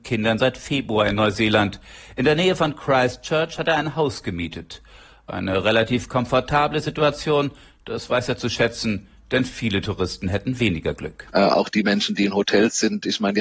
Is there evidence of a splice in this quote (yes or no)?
no